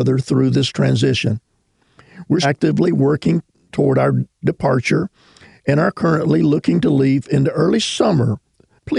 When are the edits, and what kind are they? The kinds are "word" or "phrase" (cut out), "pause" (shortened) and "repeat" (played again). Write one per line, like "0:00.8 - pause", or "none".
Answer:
0:02.4 - word